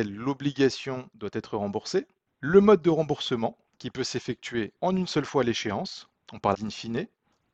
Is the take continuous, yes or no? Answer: no